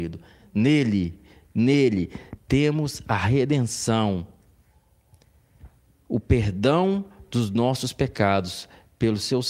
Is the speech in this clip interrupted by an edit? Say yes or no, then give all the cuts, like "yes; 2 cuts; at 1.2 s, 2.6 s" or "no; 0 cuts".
no; 0 cuts